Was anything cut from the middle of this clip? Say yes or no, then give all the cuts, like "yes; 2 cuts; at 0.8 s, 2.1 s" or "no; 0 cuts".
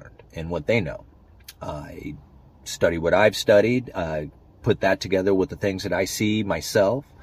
no; 0 cuts